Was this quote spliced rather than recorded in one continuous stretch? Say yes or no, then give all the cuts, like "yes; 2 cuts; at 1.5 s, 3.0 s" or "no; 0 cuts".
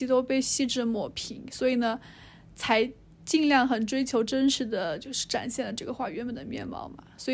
no; 0 cuts